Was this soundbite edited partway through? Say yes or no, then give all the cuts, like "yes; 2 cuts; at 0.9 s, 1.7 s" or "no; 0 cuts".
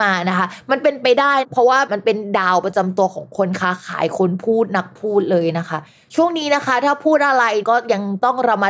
no; 0 cuts